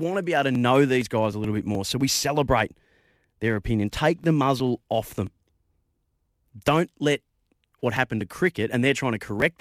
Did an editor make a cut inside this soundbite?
no; 0 cuts

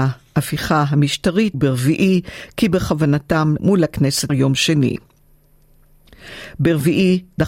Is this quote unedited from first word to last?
no; 3 cuts; at 1.5 s, 3.6 s, 4.3 s

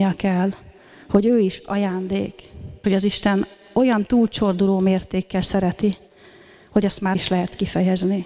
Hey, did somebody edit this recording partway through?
yes; 2 cuts; at 2.8 s, 7.1 s

